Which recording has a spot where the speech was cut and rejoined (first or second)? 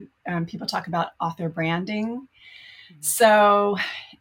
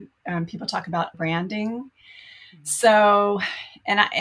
second